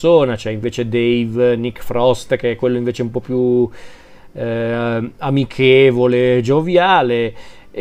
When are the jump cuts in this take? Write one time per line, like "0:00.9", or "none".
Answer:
none